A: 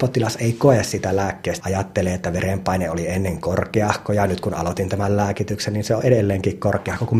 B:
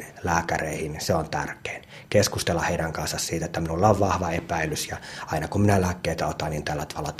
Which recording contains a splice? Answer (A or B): A